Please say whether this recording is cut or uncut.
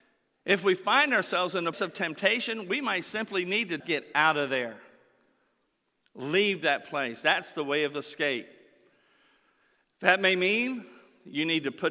cut